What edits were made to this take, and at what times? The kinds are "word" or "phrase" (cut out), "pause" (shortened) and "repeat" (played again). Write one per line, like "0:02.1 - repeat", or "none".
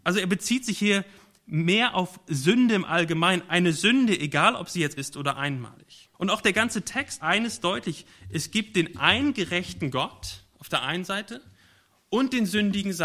0:05.0 - word
0:06.1 - pause
0:07.2 - word